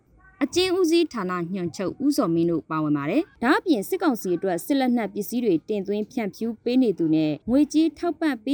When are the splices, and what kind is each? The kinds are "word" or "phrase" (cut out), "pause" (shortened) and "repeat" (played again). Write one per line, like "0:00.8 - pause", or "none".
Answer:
0:03.3 - pause
0:07.4 - pause